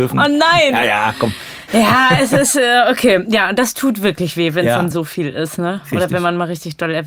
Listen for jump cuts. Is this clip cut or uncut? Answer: uncut